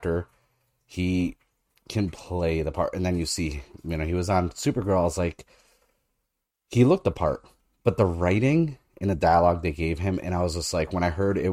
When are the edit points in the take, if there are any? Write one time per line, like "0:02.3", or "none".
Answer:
none